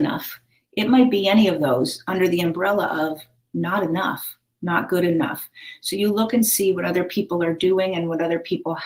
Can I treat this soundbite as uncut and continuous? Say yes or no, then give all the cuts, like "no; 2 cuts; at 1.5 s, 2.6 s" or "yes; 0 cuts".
yes; 0 cuts